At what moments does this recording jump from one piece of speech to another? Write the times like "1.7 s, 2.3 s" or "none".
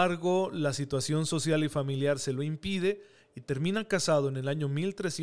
none

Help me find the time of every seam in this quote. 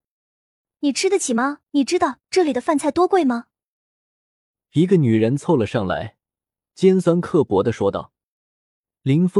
1.7 s

